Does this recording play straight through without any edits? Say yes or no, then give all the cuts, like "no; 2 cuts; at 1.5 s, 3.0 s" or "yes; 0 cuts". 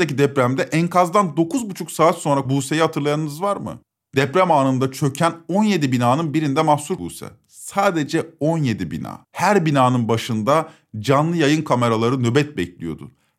no; 3 cuts; at 2.5 s, 7.0 s, 9.2 s